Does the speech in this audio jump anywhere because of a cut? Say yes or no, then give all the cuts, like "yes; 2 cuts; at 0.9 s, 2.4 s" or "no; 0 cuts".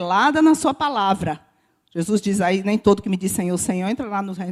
no; 0 cuts